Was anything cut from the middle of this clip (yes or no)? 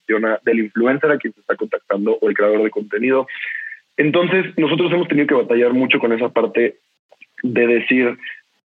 no